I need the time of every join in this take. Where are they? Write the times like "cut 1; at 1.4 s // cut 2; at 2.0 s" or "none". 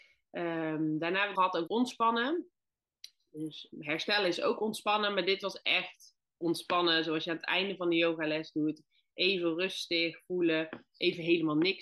cut 1; at 1.4 s // cut 2; at 1.7 s // cut 3; at 3.7 s // cut 4; at 6.3 s